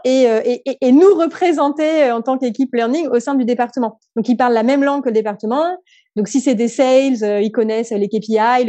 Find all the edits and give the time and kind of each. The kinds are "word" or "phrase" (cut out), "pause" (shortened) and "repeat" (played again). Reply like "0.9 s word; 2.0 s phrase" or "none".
none